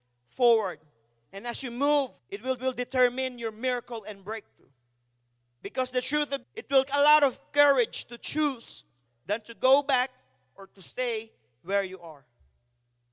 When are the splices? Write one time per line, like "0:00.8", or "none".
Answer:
0:02.2
0:02.6
0:06.4
0:06.9
0:09.0